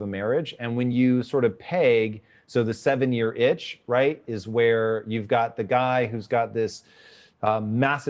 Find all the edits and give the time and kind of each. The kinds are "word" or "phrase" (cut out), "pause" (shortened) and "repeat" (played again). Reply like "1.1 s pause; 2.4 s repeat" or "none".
none

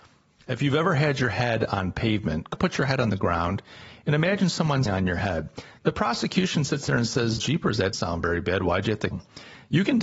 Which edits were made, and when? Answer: 2.5 s word; 4.9 s word; 7.4 s word; 7.9 s word; 9.1 s word

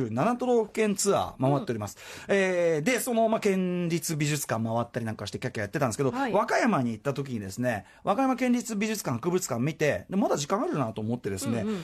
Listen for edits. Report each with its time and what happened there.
none

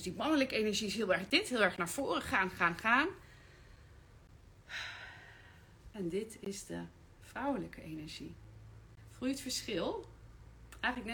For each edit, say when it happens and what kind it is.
5.8 s pause

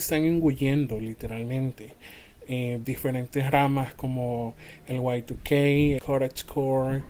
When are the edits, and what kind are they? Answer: 2.8 s word; 6.0 s word

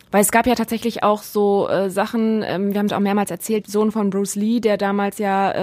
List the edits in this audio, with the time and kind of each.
2.9 s phrase; 3.6 s word

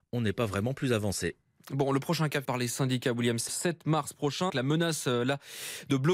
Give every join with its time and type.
2.4 s word; 3.5 s word; 4.5 s word

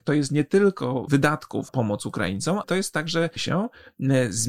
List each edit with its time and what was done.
1.1 s word; 1.7 s word; 2.6 s word; 3.4 s word

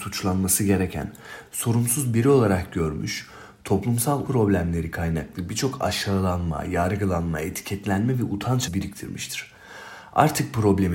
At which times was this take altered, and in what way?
4.3 s word; 8.7 s word

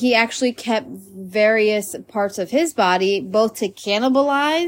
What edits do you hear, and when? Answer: none

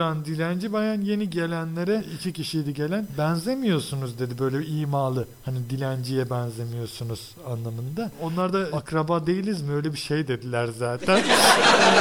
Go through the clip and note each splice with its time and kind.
none

